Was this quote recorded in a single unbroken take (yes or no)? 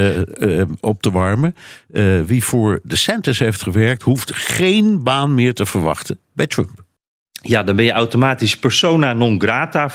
no